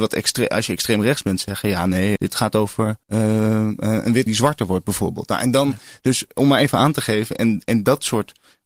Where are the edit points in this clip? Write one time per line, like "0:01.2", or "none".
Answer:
0:02.2
0:03.0
0:04.3